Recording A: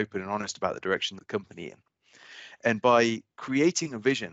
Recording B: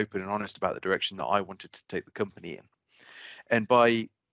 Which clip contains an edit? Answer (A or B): A